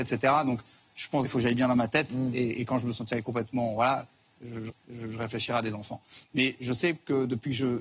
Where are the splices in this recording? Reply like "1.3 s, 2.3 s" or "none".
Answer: 1.3 s, 4.7 s